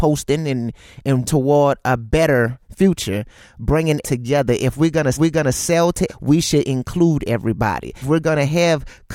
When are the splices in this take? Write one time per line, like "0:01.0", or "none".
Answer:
0:01.2
0:04.0
0:05.1
0:06.1
0:08.0